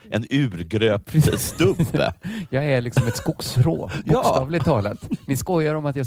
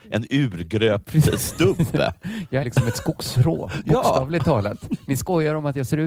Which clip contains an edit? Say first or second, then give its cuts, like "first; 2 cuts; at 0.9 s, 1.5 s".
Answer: second; 1 cut; at 2.6 s